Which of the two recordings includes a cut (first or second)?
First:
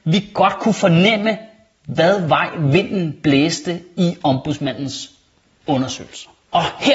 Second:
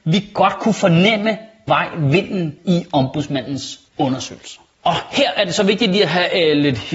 second